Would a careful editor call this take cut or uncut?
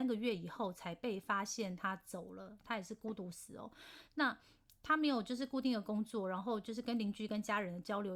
uncut